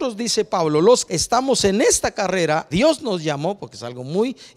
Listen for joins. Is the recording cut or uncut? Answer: cut